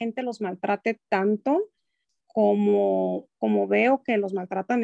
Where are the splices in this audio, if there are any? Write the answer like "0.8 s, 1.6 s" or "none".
none